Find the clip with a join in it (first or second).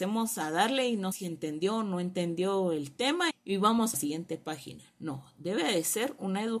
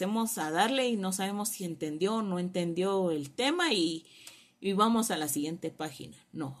first